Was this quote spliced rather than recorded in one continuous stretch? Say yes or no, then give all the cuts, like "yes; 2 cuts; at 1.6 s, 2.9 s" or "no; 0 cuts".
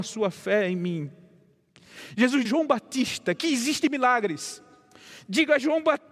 yes; 1 cut; at 2.4 s